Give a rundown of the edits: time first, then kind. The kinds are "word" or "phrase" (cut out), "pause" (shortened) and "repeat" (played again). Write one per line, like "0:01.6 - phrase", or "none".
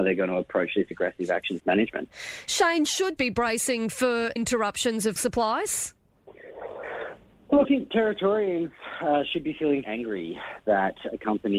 0:00.9 - word
0:01.6 - word
0:03.2 - word
0:04.4 - word
0:05.2 - word
0:07.6 - word
0:09.8 - word